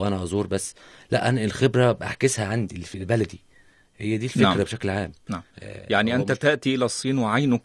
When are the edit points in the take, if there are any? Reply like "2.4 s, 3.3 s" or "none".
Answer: 5.5 s